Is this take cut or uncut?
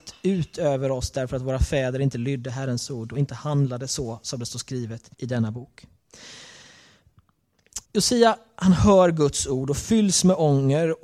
cut